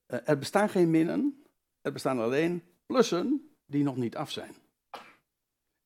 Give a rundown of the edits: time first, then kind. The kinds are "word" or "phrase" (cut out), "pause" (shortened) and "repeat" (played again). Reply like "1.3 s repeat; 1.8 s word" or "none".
none